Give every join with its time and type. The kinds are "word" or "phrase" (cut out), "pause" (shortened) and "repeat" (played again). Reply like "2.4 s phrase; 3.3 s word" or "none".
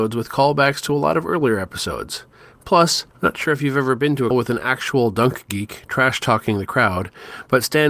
4.3 s word